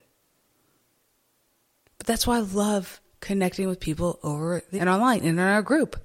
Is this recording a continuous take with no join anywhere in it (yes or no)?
no